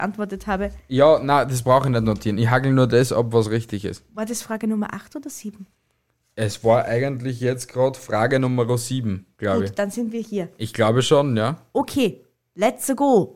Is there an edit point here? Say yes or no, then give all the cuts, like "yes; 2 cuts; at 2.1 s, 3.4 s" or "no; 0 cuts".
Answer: no; 0 cuts